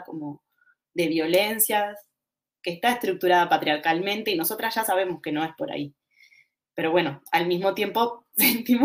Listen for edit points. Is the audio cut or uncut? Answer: uncut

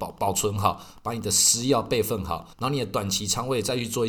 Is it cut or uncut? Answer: cut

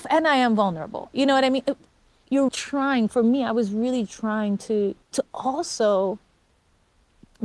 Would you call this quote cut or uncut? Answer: cut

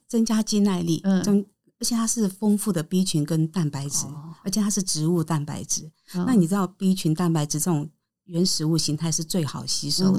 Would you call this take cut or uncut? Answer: uncut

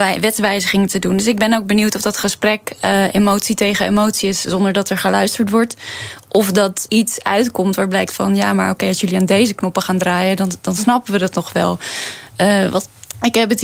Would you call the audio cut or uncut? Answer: cut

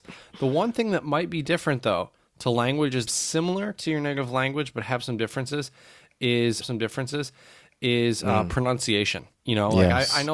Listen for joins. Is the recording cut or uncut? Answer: cut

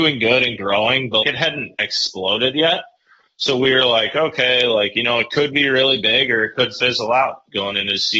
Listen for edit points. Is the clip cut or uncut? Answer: cut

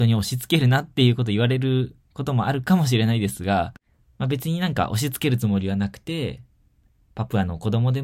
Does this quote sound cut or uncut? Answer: cut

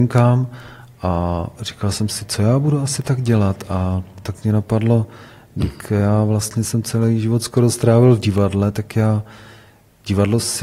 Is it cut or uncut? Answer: uncut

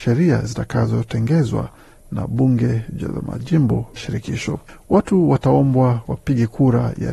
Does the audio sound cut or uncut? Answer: cut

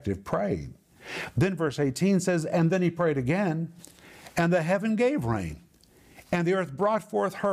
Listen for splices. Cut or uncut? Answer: uncut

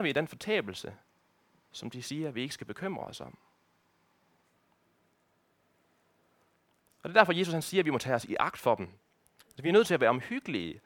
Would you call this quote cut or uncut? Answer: uncut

